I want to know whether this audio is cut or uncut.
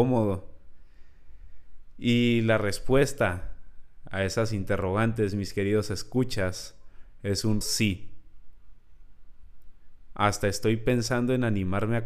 cut